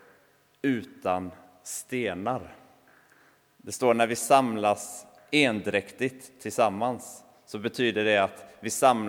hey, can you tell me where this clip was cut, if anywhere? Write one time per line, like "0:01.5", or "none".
none